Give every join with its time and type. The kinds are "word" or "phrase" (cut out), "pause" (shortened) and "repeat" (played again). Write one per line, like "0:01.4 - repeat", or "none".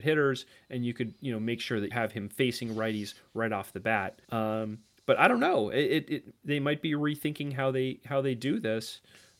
0:01.9 - word
0:04.2 - pause